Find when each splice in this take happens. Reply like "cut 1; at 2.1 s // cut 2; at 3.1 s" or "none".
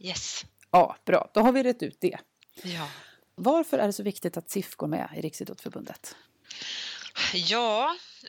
none